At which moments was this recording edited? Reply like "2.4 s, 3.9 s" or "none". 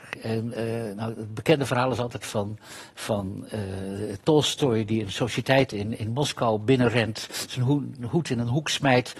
none